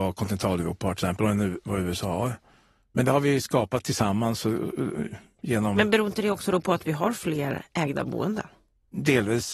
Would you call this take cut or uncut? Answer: uncut